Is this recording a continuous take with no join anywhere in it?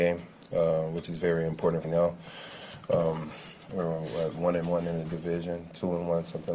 no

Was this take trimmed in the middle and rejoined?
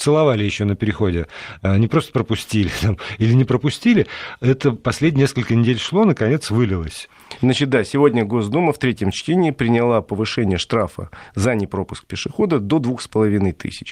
no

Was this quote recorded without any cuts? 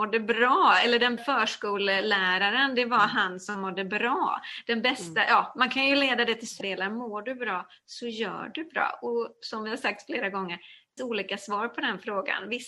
no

